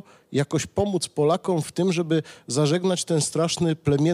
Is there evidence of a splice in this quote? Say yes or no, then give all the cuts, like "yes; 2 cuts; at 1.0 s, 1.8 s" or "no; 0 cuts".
no; 0 cuts